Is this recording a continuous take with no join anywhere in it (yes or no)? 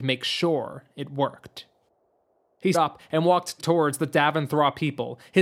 no